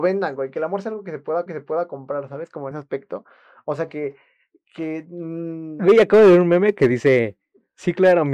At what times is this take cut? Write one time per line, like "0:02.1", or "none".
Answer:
0:01.5
0:02.7